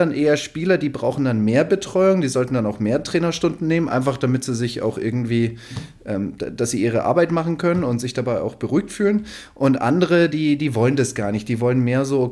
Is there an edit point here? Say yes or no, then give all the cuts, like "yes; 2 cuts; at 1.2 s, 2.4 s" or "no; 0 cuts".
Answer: no; 0 cuts